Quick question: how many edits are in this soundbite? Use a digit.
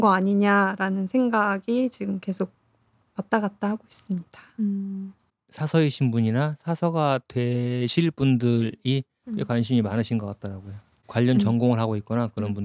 0